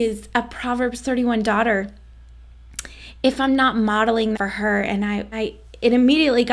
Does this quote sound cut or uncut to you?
cut